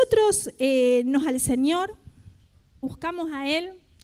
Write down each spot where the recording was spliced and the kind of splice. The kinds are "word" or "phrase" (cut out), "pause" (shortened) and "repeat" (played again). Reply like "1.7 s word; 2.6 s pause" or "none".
1.2 s word; 2.8 s word